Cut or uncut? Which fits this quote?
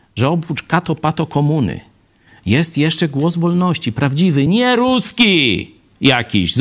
uncut